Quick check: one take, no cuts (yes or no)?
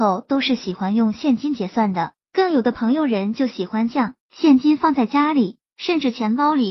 no